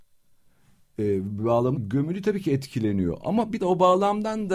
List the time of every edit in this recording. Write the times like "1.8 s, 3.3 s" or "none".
1.8 s, 3.6 s